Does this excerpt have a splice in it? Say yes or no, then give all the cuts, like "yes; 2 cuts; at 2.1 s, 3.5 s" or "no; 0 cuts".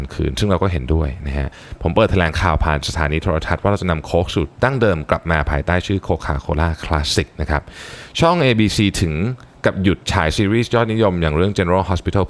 yes; 2 cuts; at 4.5 s, 10.0 s